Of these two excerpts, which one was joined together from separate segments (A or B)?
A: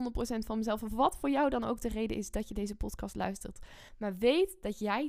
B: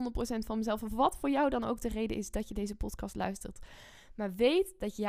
A